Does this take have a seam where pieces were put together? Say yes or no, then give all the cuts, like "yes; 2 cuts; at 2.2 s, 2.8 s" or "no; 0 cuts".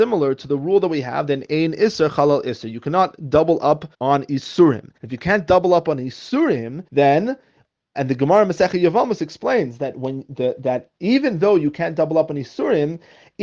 yes; 4 cuts; at 3.9 s, 5.0 s, 6.9 s, 7.9 s